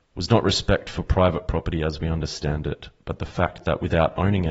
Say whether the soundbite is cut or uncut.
uncut